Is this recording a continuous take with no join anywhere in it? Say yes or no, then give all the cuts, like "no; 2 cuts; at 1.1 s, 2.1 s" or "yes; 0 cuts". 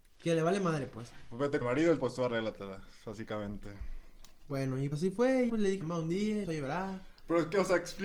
no; 6 cuts; at 1.6 s, 2.0 s, 4.9 s, 5.5 s, 5.8 s, 6.4 s